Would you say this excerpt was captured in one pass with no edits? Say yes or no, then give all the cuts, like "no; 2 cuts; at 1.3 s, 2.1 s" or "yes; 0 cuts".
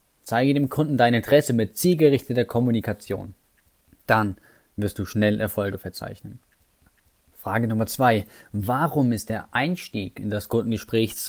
yes; 0 cuts